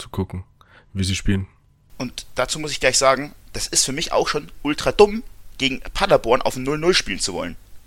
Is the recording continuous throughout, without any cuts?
yes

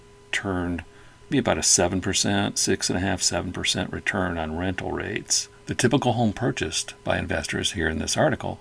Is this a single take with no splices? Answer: no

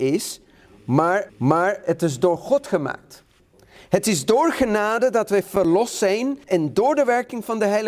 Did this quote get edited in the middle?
yes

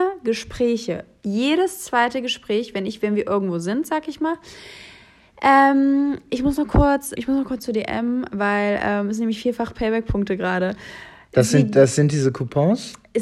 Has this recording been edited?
yes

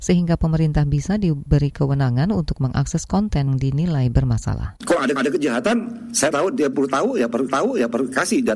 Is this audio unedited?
no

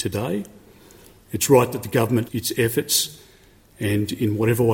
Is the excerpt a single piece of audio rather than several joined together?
no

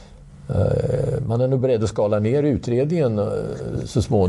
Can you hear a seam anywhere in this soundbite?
no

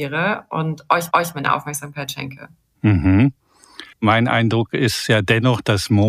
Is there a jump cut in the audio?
yes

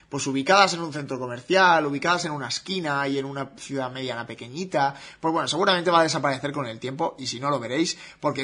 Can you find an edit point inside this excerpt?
no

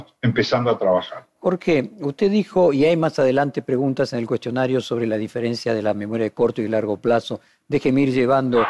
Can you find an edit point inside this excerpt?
no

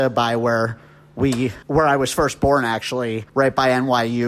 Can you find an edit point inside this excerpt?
yes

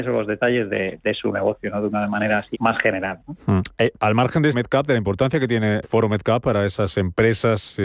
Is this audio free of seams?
no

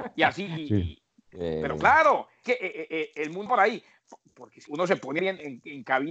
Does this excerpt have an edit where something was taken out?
yes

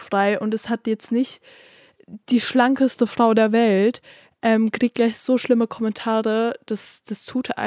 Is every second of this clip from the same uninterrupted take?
yes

